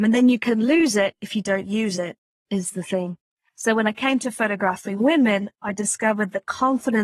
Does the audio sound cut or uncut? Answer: uncut